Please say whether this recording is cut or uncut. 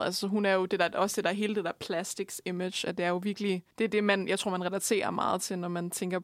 cut